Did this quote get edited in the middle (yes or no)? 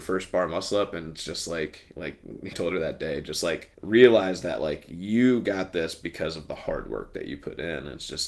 yes